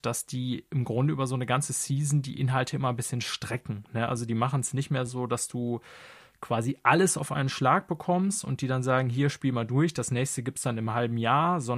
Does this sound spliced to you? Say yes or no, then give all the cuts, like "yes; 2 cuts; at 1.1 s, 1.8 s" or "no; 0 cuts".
no; 0 cuts